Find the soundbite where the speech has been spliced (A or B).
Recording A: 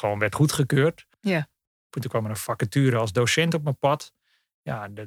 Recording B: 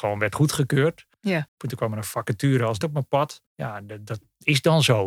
B